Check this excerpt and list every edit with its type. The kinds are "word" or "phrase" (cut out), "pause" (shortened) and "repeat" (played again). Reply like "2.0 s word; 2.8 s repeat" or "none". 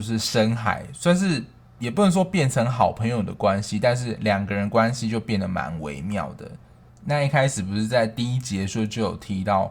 none